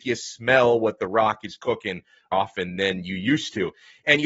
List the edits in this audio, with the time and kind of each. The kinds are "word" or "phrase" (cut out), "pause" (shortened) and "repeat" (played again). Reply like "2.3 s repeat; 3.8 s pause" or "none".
2.3 s phrase